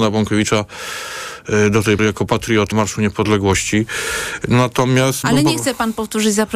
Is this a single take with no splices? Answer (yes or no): no